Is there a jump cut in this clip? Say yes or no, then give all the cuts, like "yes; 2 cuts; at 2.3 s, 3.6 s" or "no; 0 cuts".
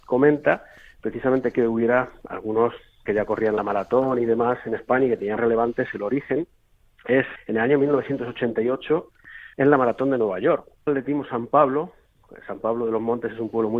yes; 6 cuts; at 1.5 s, 3.1 s, 5.4 s, 7.4 s, 9.5 s, 10.9 s